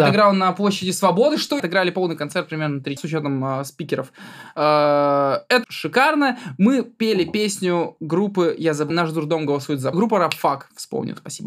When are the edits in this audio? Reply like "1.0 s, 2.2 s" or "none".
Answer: 1.6 s, 3.0 s, 5.6 s, 8.9 s, 9.9 s